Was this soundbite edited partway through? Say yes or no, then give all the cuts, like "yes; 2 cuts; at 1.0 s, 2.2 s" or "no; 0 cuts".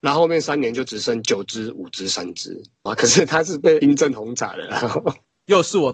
yes; 1 cut; at 2.9 s